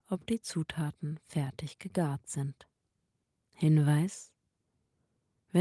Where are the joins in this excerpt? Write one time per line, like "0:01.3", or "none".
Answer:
0:03.1